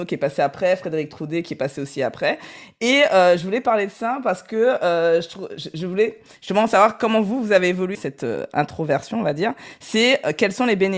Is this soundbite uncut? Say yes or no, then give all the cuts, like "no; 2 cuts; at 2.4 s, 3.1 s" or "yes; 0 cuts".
no; 1 cut; at 7.9 s